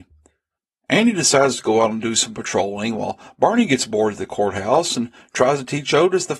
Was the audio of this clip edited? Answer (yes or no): no